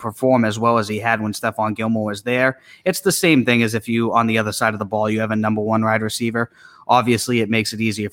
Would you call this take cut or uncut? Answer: uncut